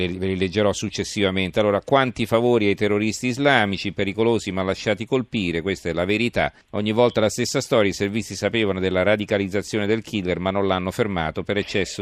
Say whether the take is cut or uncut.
cut